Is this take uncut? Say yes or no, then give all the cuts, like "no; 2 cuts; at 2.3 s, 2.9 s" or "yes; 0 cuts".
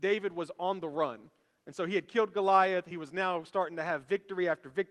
yes; 0 cuts